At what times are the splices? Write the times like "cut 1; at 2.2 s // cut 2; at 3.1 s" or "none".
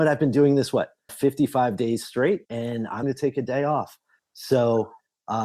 cut 1; at 1.1 s // cut 2; at 2.4 s // cut 3; at 3.0 s